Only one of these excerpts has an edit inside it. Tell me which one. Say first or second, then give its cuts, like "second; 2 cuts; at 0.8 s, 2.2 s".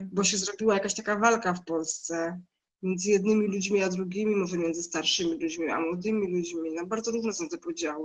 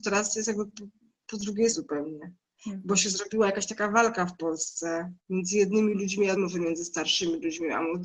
second; 3 cuts; at 1.7 s, 5.2 s, 6.4 s